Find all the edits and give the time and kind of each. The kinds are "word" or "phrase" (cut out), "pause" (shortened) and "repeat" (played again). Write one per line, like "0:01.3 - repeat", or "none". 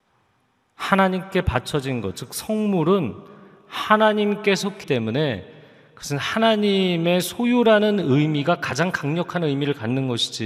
0:04.8 - word